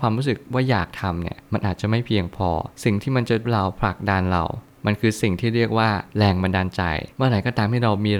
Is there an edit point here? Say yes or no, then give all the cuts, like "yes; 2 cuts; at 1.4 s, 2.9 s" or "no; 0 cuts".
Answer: yes; 5 cuts; at 1.4 s, 2.7 s, 3.4 s, 6.1 s, 7.1 s